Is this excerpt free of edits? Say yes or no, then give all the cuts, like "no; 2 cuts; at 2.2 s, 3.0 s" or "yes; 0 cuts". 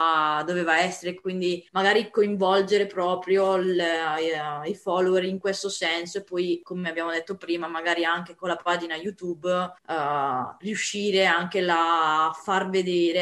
no; 2 cuts; at 1.7 s, 9.8 s